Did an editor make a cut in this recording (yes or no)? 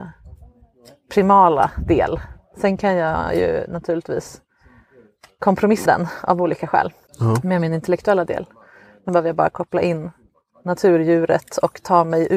yes